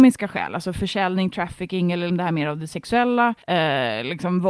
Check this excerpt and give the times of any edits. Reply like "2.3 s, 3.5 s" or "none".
2.1 s, 3.4 s